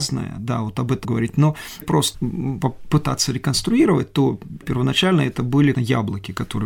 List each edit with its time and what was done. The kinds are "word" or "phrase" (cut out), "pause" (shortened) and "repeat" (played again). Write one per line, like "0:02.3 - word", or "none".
0:01.0 - word
0:01.8 - word
0:02.1 - word
0:04.6 - word
0:05.7 - word

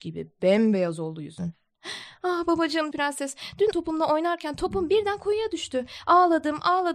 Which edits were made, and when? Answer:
0:02.9 - word
0:03.7 - phrase

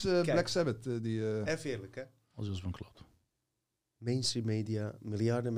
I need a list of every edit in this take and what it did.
0:01.5 - word

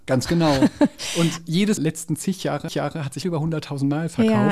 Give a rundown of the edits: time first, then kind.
0:01.8 - phrase
0:02.7 - repeat
0:03.2 - phrase

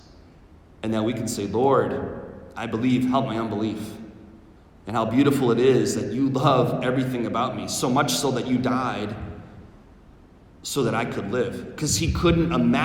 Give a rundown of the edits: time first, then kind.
0:04.6 - pause

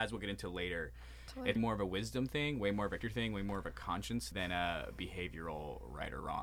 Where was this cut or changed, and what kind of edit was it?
0:01.6 - word
0:03.0 - word
0:04.3 - word

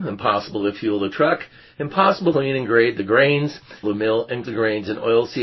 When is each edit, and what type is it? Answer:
0:02.3 - word
0:03.8 - word
0:04.4 - word

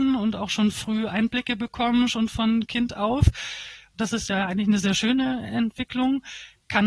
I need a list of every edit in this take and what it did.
none

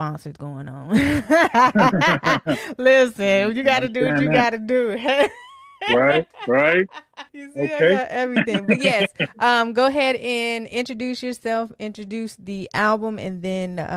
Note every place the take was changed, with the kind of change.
0:07.3 - pause

